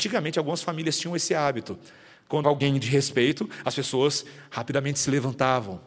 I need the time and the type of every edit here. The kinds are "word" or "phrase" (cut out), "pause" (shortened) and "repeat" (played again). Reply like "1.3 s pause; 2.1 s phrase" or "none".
2.4 s word